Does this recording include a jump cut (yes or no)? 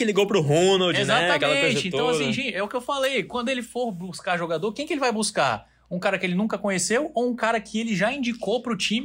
no